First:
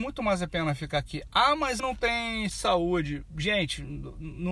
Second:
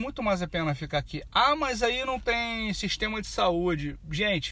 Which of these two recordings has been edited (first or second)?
first